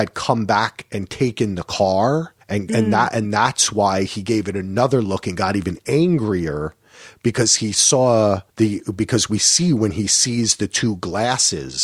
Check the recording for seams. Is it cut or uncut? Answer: cut